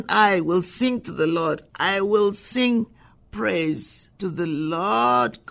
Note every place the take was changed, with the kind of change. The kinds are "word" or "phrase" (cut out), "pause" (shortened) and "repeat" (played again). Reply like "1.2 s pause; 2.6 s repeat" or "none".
4.1 s pause